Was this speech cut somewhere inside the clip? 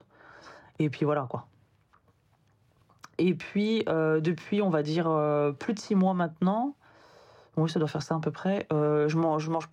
no; 0 cuts

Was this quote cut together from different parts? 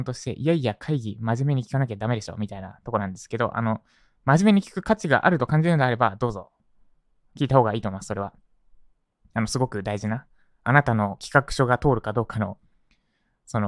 no; 0 cuts

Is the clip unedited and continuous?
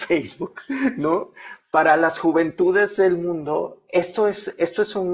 yes; 0 cuts

